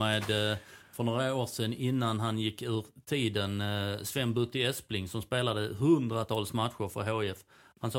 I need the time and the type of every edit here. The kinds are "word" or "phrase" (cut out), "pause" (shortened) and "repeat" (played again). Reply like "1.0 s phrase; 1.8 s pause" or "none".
none